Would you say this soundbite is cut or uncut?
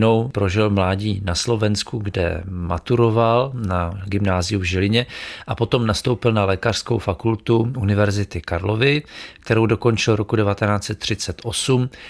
uncut